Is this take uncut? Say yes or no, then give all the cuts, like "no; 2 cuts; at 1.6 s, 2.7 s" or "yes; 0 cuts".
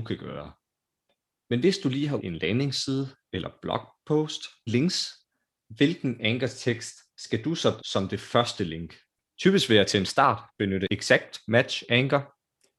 no; 3 cuts; at 2.2 s, 4.7 s, 7.8 s